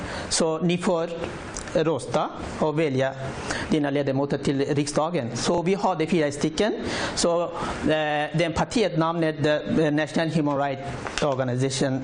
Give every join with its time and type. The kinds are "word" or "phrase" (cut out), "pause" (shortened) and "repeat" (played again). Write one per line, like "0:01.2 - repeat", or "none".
none